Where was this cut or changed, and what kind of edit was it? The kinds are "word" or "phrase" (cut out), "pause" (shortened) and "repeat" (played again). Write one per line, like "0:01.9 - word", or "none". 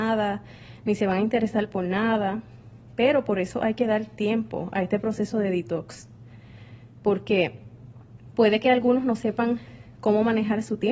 none